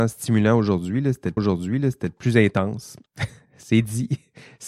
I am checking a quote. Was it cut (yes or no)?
yes